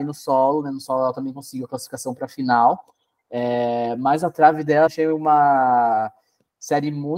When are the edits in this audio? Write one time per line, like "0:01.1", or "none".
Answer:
0:04.9